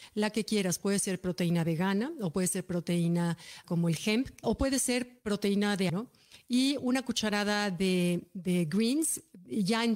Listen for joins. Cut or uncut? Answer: cut